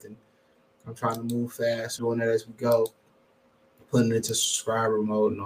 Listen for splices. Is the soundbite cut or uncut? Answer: cut